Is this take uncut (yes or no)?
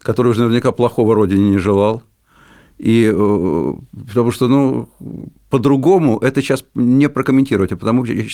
yes